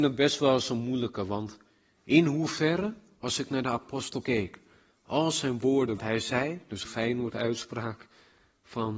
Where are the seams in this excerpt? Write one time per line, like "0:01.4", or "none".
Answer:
0:04.2
0:06.0
0:06.8